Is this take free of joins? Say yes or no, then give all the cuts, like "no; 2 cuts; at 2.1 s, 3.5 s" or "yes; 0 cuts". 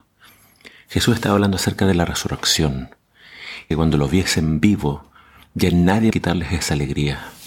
no; 2 cuts; at 3.7 s, 6.1 s